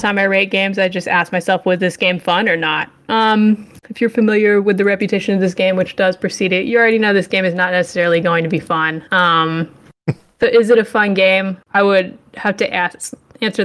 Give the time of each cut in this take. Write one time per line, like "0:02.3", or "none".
0:09.1
0:11.6